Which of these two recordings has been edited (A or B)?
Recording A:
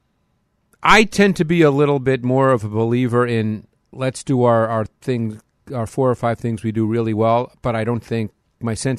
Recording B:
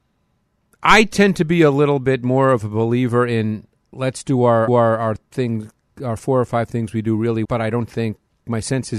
B